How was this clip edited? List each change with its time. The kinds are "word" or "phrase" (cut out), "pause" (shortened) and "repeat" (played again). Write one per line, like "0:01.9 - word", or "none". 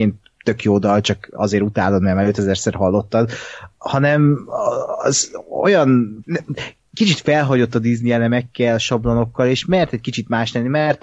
0:06.2 - word